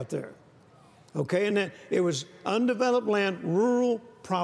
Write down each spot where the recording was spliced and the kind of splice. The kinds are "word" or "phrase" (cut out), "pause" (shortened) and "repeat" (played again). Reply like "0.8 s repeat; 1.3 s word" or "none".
none